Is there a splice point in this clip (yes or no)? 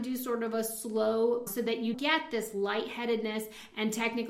yes